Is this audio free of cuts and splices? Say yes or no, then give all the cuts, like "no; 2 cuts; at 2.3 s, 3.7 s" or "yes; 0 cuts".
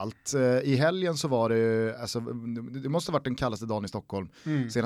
yes; 0 cuts